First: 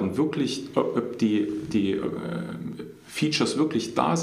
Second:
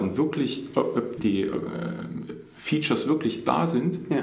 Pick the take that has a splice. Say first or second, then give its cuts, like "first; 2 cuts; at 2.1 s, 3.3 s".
second; 1 cut; at 1.2 s